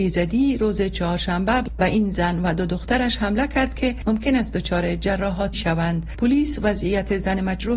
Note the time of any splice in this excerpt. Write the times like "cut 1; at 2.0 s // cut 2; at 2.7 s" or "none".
cut 1; at 5.5 s